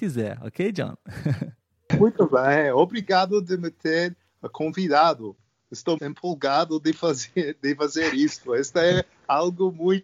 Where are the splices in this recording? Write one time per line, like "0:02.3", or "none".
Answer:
0:06.0